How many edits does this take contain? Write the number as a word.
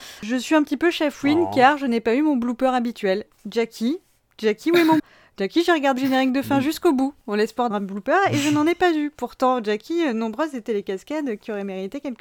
three